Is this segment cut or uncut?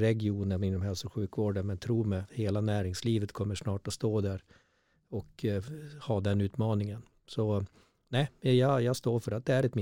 uncut